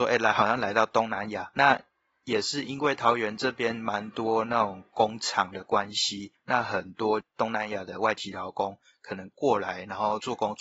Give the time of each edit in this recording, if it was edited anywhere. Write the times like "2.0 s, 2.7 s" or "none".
none